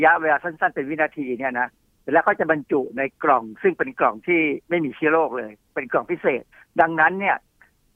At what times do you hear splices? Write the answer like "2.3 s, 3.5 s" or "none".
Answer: 6.5 s